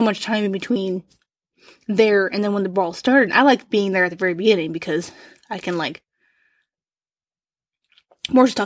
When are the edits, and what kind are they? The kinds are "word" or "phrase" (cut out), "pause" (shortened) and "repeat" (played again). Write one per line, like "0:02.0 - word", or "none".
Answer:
none